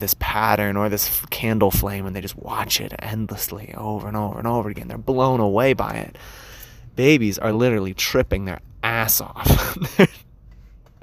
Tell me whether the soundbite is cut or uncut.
uncut